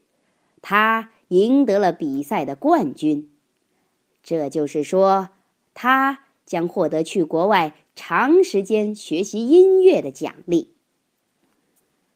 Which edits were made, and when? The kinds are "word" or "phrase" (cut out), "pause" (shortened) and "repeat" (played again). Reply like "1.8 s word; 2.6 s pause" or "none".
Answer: none